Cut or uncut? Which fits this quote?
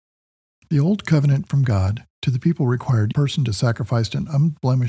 cut